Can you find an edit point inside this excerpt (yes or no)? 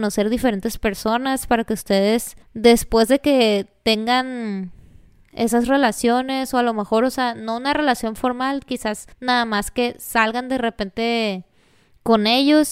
yes